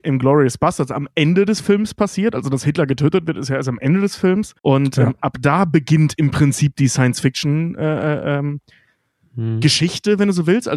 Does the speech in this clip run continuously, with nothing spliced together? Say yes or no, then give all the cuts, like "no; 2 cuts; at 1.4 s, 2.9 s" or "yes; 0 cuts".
no; 1 cut; at 4.6 s